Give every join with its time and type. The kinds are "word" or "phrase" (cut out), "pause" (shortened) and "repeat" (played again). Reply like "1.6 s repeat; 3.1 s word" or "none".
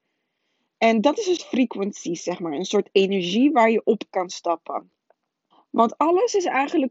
1.4 s word; 4.1 s word; 5.5 s pause